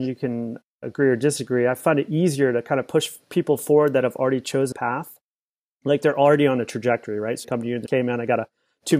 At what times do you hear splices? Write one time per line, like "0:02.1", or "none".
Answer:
0:04.7
0:07.4
0:07.9